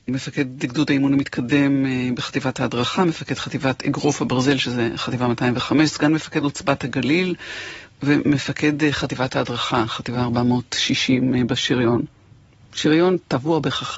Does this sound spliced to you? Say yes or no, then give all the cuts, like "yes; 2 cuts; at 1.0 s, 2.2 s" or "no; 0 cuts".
no; 0 cuts